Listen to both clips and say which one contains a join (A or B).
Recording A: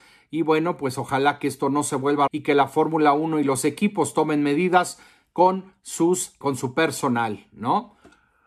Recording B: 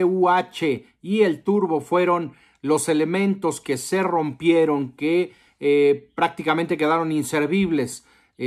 A